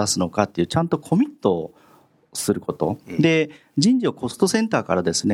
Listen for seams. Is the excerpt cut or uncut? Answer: uncut